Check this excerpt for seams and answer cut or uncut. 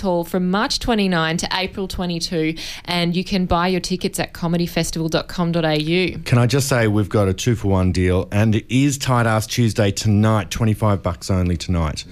uncut